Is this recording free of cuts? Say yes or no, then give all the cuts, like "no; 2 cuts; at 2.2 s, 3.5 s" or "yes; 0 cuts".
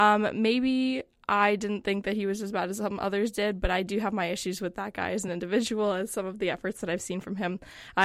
yes; 0 cuts